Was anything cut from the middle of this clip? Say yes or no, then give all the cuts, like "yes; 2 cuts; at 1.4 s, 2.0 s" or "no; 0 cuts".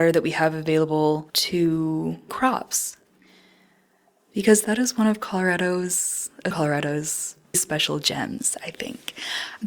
yes; 3 cuts; at 2.3 s, 6.5 s, 7.5 s